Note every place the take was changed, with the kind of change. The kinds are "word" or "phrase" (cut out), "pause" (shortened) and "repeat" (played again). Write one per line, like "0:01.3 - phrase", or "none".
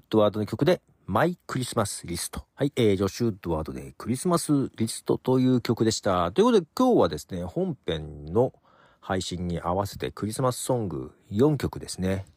0:02.5 - pause